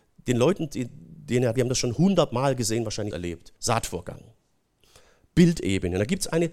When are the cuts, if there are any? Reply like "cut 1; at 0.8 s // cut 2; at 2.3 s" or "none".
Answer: cut 1; at 1.5 s // cut 2; at 3.1 s // cut 3; at 3.6 s